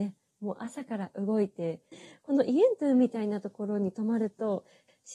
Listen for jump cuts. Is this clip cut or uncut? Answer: uncut